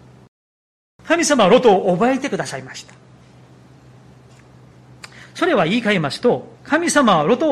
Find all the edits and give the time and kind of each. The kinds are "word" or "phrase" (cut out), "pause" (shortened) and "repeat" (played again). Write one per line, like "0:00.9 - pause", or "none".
0:06.5 - pause